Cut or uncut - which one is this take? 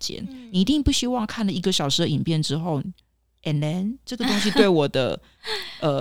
uncut